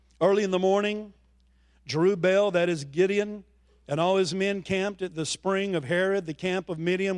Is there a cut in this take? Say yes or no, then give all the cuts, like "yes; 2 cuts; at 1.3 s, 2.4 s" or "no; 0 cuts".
no; 0 cuts